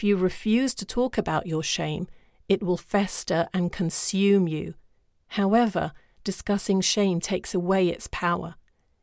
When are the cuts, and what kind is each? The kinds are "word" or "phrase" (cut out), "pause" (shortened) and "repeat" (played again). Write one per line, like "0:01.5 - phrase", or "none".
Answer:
none